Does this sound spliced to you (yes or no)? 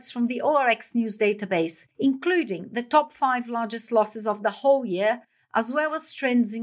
yes